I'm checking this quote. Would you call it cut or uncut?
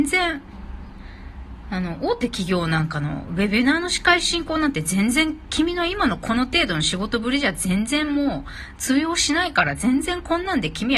uncut